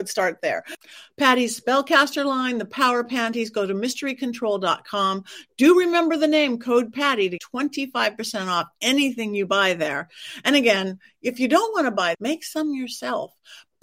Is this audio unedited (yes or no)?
no